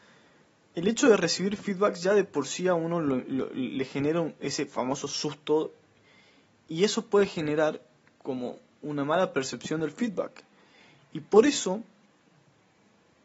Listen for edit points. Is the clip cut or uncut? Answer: uncut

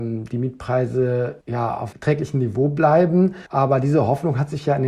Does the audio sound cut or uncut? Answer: cut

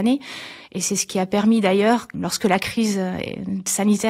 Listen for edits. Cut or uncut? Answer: cut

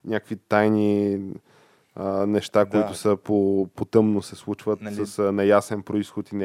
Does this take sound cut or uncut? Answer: uncut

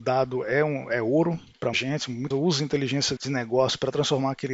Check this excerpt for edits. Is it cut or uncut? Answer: cut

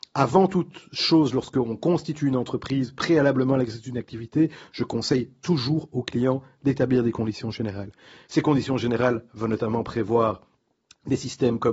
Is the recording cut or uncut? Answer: uncut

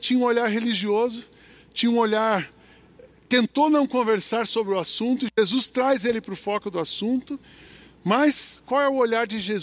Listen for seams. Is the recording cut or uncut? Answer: uncut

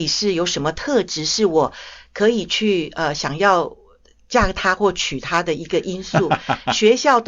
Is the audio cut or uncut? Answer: uncut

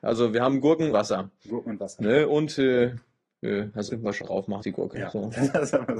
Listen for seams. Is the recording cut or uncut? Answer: cut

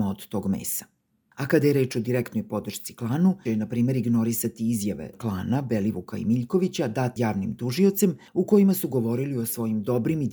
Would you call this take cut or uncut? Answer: cut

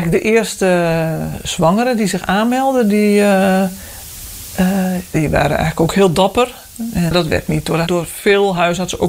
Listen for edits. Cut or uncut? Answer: cut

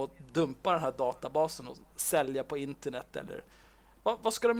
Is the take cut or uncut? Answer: uncut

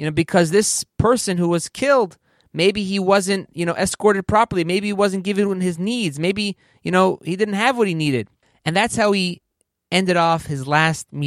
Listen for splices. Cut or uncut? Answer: uncut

